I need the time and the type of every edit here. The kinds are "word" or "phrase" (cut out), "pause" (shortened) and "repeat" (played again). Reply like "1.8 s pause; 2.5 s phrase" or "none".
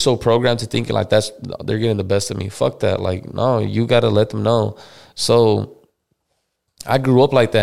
none